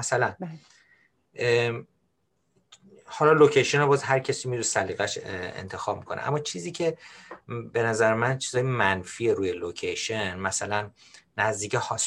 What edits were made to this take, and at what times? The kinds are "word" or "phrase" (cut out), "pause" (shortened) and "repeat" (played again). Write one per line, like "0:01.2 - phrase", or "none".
none